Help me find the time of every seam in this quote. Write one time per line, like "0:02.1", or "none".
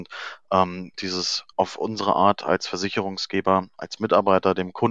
0:00.9
0:01.5